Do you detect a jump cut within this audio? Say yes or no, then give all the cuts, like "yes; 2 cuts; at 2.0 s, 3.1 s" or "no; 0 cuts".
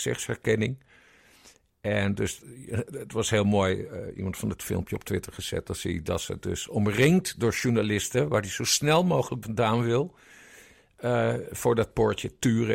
yes; 2 cuts; at 4.6 s, 9.4 s